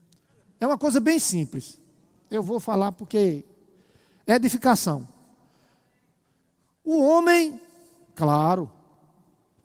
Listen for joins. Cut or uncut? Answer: uncut